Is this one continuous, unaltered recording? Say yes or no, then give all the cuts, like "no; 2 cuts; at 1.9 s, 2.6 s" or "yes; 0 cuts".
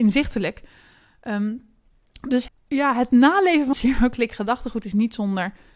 no; 2 cuts; at 2.5 s, 3.7 s